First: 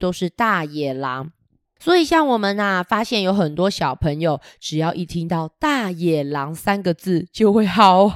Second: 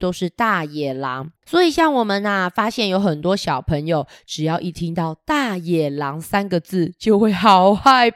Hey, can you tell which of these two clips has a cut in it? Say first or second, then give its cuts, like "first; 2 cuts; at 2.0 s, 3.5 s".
second; 1 cut; at 1.4 s